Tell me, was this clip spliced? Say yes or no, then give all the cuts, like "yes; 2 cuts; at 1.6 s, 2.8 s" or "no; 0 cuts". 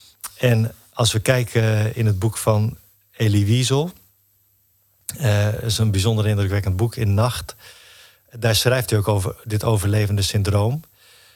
no; 0 cuts